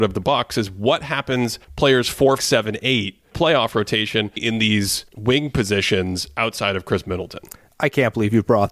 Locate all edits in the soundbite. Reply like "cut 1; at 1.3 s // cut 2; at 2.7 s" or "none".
cut 1; at 1.6 s // cut 2; at 2.4 s // cut 3; at 3.3 s // cut 4; at 4.4 s // cut 5; at 5.1 s // cut 6; at 7.5 s